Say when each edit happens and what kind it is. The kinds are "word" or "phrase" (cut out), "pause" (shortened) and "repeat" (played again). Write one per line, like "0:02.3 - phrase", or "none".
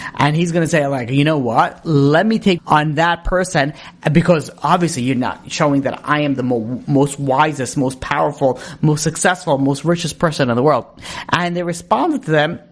0:02.6 - word